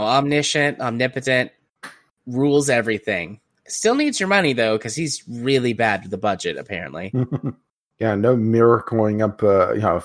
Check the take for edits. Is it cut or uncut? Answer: uncut